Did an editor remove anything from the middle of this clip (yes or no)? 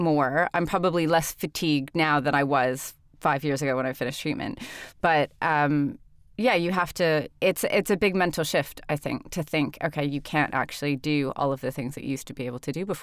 no